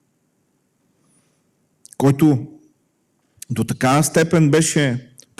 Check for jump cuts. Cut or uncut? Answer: uncut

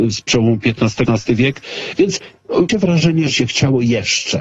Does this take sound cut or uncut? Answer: cut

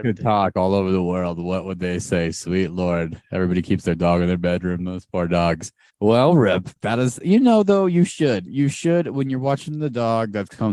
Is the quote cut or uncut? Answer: cut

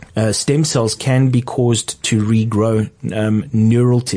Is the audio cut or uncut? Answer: uncut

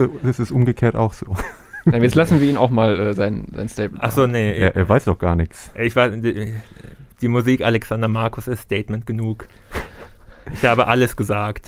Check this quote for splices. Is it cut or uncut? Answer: uncut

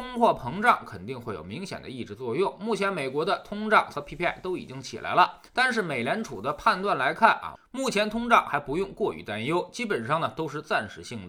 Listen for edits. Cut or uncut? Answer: cut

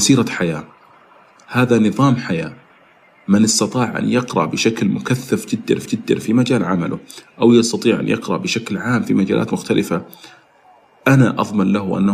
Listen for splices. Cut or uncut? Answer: cut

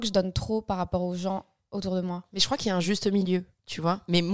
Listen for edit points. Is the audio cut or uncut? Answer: uncut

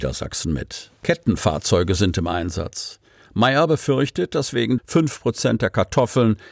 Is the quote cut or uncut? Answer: cut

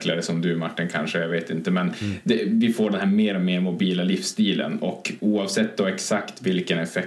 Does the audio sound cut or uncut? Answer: uncut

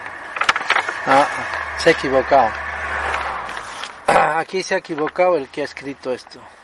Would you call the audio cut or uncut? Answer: uncut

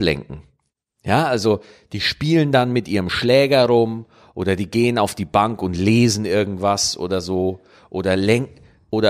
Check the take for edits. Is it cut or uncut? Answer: uncut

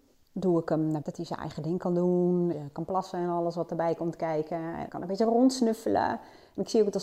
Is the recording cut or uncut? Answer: cut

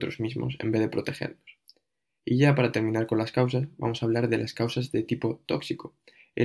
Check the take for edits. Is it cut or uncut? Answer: uncut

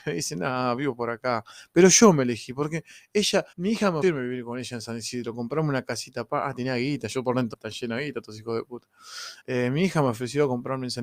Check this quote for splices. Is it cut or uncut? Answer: cut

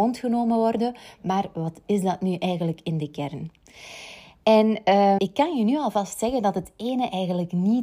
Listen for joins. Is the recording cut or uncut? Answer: cut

